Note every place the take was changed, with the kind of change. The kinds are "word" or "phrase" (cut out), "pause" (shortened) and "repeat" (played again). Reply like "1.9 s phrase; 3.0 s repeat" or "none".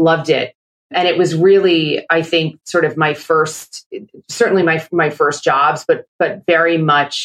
none